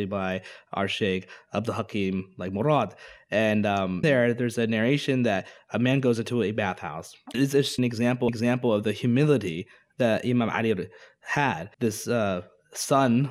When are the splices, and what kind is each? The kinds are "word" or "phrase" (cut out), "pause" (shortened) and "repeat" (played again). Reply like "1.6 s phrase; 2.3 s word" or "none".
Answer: 4.0 s word; 7.3 s word; 7.8 s phrase; 8.3 s repeat; 11.7 s pause